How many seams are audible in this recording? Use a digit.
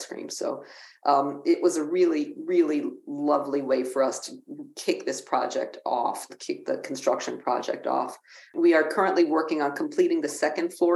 0